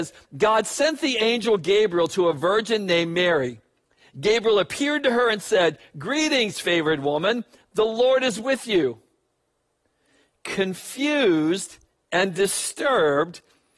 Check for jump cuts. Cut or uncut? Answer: uncut